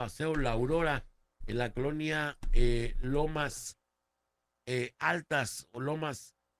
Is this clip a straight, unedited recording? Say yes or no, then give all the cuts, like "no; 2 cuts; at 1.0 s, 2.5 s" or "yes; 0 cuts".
yes; 0 cuts